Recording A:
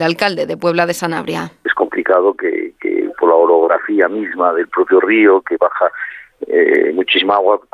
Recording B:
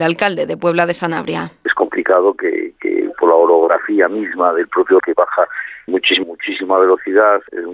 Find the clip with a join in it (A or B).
B